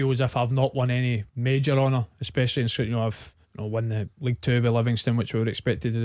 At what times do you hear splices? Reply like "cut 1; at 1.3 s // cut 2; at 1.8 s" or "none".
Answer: cut 1; at 1.3 s // cut 2; at 3.4 s // cut 3; at 4.1 s